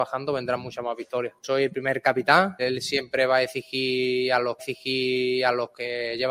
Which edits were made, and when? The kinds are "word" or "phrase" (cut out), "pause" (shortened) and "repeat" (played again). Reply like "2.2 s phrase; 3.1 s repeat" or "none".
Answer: 2.6 s word; 4.6 s repeat